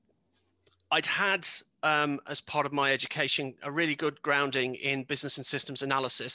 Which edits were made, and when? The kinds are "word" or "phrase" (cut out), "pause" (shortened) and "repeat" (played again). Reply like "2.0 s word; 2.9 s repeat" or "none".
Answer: none